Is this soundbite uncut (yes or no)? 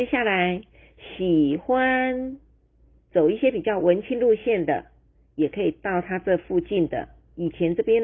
yes